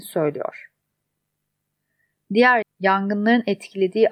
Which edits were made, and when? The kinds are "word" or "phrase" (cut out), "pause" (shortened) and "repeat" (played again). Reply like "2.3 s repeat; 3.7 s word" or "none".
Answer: 2.6 s word